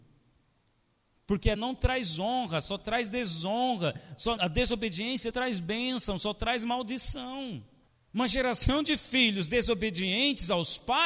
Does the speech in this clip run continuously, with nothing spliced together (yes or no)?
no